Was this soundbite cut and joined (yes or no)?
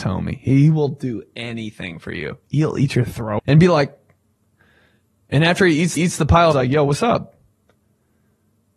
yes